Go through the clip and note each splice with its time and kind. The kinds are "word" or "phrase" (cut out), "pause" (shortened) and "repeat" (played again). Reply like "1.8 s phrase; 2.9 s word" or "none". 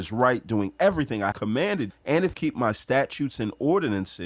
1.3 s word; 1.9 s word; 2.3 s word

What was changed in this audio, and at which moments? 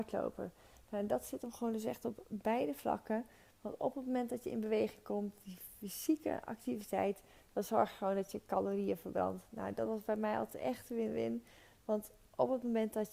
none

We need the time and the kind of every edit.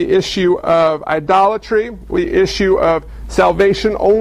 2.1 s word

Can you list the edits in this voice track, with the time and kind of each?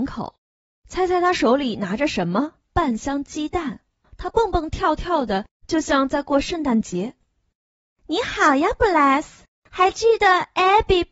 2.6 s pause; 4.0 s pause

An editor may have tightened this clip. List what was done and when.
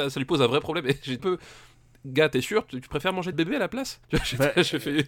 1.2 s word; 3.3 s phrase; 4.0 s pause

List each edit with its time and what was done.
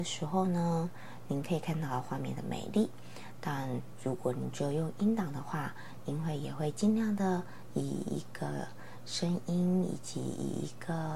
none

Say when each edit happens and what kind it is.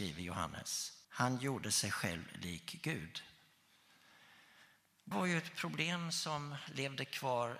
1.0 s pause; 5.1 s word

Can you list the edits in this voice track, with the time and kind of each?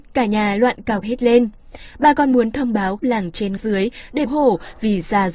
1.0 s word; 3.0 s word; 3.6 s word; 4.3 s phrase

